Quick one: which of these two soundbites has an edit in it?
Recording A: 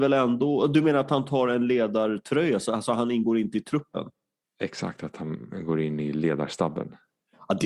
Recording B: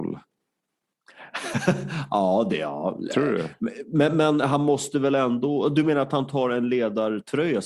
A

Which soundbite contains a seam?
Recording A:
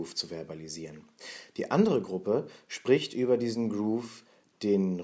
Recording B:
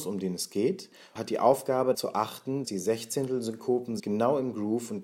B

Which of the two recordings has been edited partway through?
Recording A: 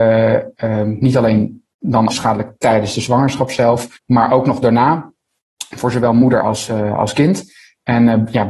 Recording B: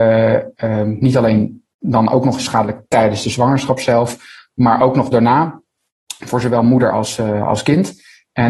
A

